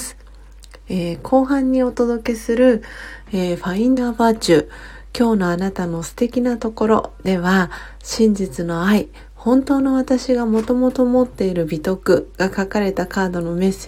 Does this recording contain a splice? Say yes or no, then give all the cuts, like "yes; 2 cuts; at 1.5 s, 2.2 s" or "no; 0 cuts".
yes; 1 cut; at 4.0 s